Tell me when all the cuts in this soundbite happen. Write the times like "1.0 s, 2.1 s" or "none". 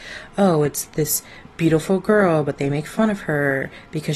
none